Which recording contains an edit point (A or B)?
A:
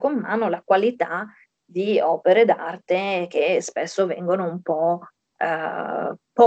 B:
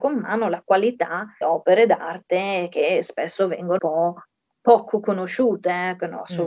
B